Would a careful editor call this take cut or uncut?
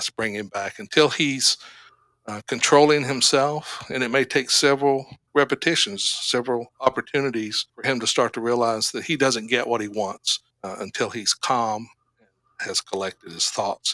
cut